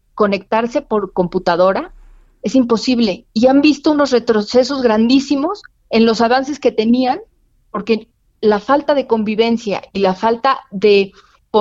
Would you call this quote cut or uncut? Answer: uncut